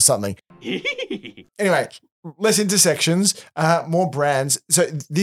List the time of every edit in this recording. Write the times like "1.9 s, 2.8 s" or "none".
none